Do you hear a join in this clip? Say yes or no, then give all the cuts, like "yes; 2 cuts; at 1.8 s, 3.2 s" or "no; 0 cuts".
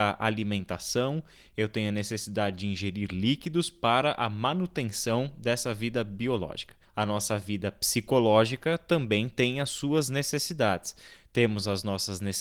no; 0 cuts